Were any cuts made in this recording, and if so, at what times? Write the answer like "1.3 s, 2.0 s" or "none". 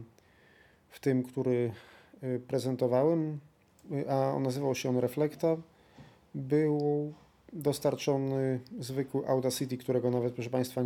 none